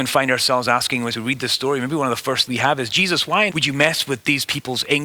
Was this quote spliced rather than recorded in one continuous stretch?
yes; 2 cuts; at 2.5 s, 3.5 s

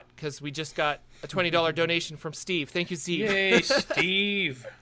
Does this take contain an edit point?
no; 0 cuts

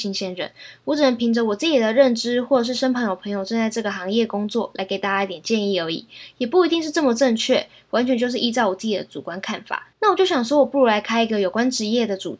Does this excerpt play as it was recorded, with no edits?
no; 1 cut; at 9.9 s

